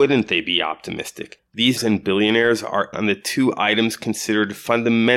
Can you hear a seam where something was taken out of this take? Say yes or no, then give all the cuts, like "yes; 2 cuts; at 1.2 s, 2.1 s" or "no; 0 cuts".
yes; 2 cuts; at 1.8 s, 2.9 s